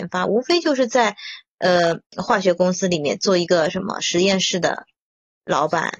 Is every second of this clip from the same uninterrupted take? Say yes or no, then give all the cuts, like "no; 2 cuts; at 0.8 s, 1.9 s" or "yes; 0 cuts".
no; 1 cut; at 2.1 s